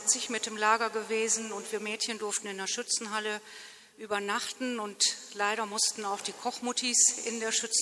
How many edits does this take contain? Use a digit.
0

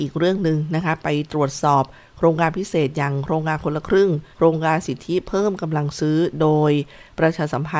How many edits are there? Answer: 1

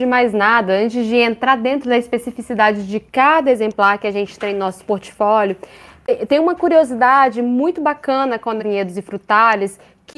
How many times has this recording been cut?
2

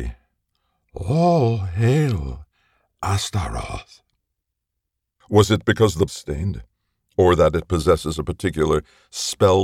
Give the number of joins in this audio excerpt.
1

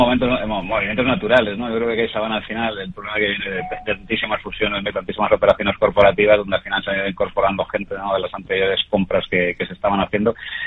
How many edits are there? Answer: 0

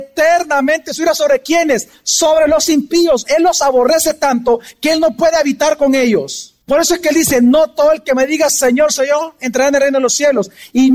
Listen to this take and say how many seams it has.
1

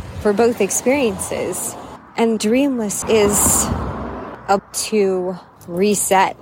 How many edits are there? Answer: 3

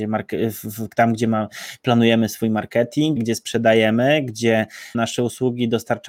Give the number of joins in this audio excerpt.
2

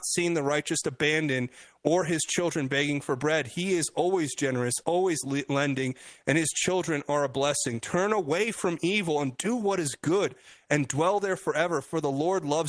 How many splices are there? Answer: 0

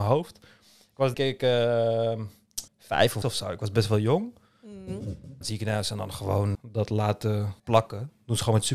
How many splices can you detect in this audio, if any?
6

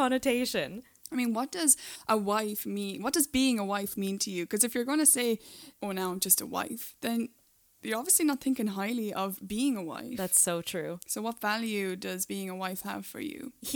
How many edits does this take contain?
0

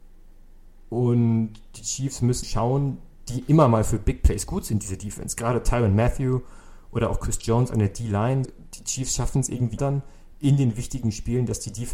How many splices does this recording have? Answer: 3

